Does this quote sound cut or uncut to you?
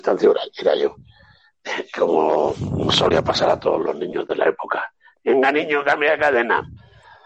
uncut